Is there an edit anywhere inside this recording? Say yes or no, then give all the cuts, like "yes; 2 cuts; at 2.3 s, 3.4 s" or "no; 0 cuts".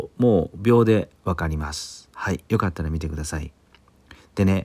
yes; 1 cut; at 2.1 s